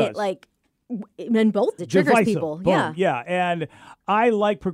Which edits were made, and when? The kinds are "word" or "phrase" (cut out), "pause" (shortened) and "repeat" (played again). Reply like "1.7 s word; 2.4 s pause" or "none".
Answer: 1.8 s word